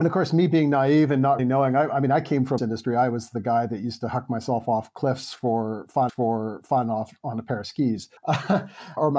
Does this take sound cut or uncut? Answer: cut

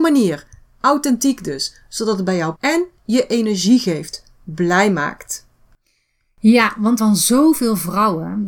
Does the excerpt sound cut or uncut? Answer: cut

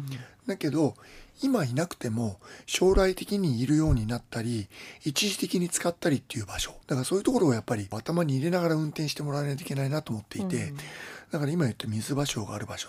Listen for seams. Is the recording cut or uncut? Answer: cut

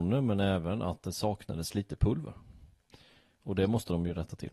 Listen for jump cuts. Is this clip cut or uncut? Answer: uncut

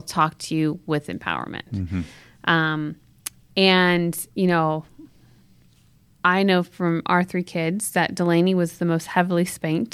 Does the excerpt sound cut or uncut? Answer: uncut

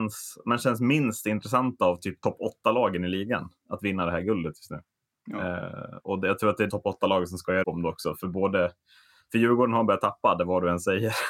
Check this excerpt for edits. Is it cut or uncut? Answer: cut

